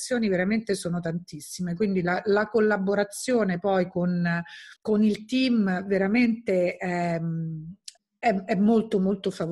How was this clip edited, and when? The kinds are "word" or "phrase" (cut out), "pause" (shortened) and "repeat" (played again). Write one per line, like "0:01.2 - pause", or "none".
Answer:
0:04.8 - pause
0:08.0 - pause